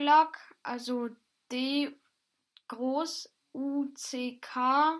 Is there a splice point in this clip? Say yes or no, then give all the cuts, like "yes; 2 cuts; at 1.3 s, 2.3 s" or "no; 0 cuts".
no; 0 cuts